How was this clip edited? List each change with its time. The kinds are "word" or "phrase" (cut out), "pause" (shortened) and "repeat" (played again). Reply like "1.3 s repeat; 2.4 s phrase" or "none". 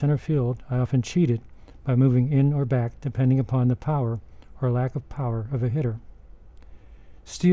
none